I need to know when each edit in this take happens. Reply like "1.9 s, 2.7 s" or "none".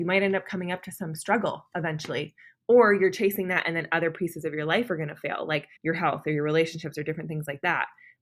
5.8 s